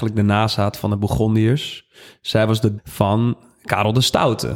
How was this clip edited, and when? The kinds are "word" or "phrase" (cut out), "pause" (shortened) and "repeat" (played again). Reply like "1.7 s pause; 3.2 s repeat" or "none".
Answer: 2.8 s word